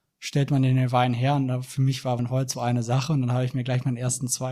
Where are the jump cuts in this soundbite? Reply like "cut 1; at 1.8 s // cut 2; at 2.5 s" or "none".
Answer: cut 1; at 2.2 s // cut 2; at 2.5 s